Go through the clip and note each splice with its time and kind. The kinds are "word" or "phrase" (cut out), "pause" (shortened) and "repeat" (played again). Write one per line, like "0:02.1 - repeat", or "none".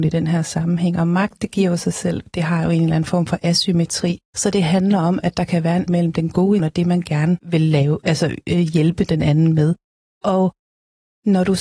0:04.2 - pause
0:05.9 - word
0:06.6 - word
0:07.4 - pause